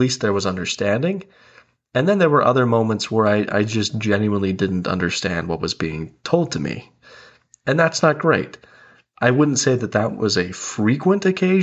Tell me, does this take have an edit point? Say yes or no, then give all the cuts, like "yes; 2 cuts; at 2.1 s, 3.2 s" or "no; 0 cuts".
no; 0 cuts